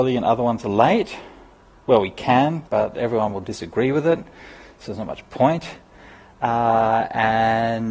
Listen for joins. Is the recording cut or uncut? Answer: cut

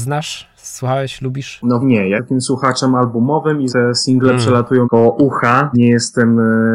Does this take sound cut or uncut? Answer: cut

